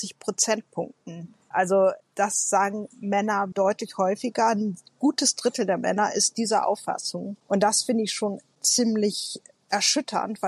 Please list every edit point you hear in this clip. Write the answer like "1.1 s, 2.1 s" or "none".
3.5 s

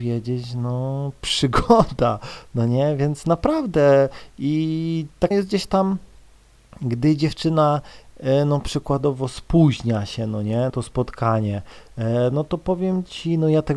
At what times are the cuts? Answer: 5.3 s, 10.7 s

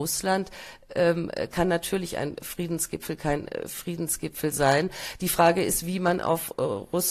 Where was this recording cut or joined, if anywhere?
none

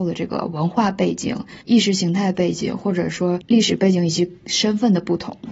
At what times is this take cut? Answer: 1.6 s

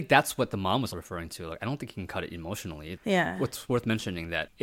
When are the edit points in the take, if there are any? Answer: 0.9 s

